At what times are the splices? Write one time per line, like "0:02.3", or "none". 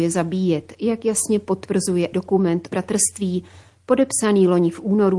0:02.1
0:02.7